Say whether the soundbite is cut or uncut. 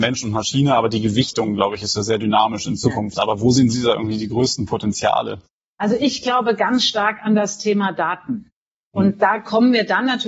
uncut